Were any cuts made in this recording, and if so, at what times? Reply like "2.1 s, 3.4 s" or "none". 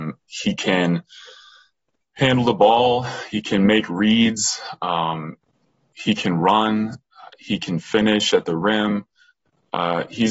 none